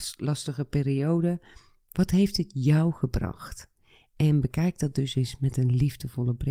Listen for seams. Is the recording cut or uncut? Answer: uncut